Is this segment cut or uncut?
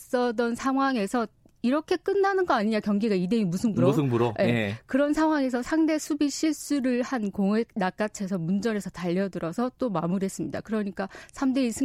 uncut